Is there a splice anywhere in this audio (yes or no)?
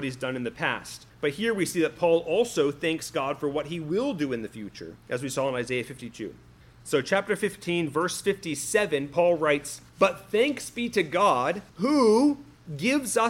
yes